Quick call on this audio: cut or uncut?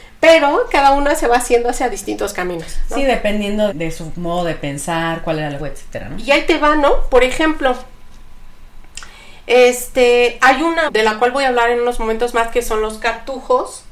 cut